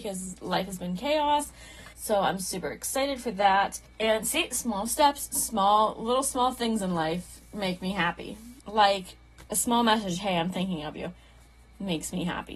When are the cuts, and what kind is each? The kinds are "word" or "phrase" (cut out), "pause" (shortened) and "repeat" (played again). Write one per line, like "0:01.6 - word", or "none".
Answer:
0:01.9 - pause
0:03.9 - pause
0:08.6 - pause